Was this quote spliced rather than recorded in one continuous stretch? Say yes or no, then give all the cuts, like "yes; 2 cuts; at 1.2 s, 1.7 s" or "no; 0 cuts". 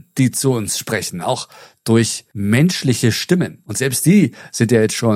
no; 0 cuts